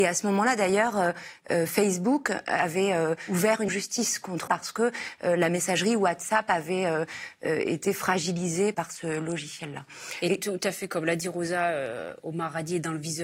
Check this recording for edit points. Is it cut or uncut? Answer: cut